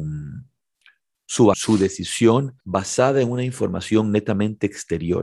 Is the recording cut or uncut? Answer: cut